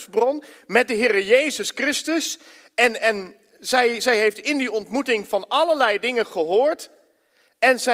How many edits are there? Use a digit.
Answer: 0